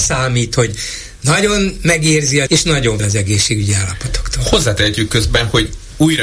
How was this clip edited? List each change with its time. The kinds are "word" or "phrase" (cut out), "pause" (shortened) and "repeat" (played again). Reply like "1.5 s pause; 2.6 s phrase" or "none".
2.5 s word; 3.0 s word